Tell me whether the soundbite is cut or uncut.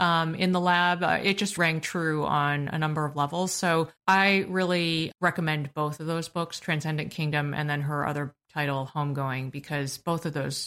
cut